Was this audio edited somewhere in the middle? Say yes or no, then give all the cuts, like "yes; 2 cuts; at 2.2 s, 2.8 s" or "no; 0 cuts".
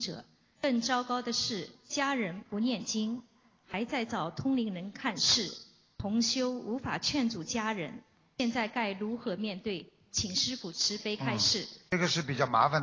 yes; 1 cut; at 11.9 s